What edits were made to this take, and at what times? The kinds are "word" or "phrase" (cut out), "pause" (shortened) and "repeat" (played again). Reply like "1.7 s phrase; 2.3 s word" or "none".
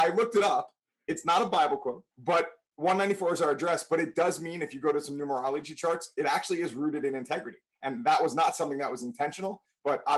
2.1 s pause